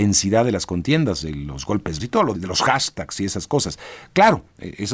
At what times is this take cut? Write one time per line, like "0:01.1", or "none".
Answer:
0:02.0
0:02.3

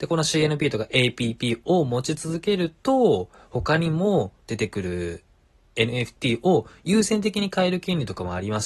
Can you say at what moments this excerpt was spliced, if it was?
none

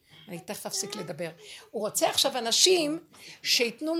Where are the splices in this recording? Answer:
none

